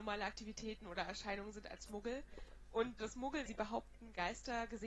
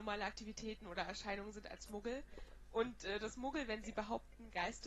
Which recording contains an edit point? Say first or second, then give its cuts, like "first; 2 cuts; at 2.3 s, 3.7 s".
first; 2 cuts; at 3.0 s, 3.5 s